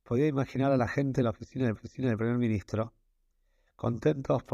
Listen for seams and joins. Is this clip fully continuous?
no; 1 cut; at 1.7 s

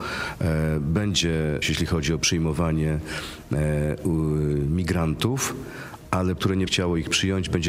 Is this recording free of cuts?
no; 3 cuts; at 1.6 s, 6.4 s, 6.7 s

